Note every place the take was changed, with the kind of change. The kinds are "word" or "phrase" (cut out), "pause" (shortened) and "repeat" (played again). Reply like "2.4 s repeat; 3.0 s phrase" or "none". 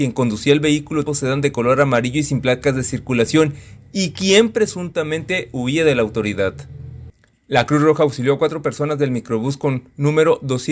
1.1 s word